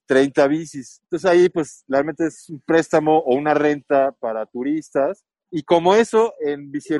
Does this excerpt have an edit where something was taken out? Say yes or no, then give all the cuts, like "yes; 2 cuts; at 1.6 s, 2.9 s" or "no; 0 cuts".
yes; 1 cut; at 1.0 s